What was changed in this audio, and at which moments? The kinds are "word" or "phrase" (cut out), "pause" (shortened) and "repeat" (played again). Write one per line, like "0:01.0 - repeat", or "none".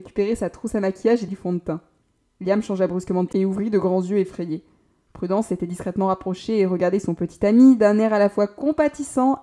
0:01.3 - word
0:03.3 - word